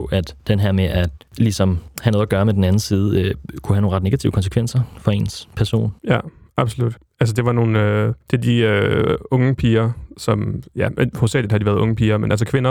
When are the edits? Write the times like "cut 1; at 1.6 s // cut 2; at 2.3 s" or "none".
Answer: cut 1; at 6.0 s